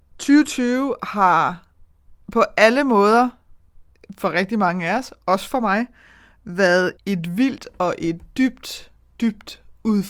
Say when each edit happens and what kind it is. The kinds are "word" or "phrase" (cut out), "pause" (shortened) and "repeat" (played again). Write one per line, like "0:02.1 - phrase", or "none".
0:02.2 - pause
0:07.0 - word